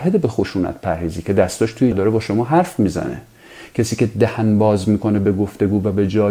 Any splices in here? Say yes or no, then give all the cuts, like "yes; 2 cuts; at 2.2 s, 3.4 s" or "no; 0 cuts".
yes; 1 cut; at 1.9 s